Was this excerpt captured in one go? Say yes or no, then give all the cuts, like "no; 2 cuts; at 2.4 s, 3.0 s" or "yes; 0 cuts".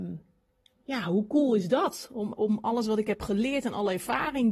yes; 0 cuts